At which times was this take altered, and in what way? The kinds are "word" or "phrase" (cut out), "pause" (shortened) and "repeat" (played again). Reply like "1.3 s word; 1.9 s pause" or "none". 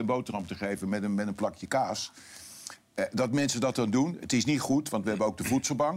none